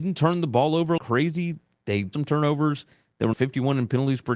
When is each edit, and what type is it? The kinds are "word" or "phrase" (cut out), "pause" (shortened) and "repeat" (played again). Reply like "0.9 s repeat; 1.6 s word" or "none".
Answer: 1.0 s word; 2.1 s word; 3.3 s word